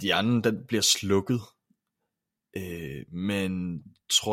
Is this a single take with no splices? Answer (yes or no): yes